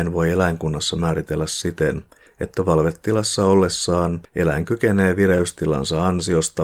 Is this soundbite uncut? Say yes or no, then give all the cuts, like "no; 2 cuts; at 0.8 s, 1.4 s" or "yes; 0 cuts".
yes; 0 cuts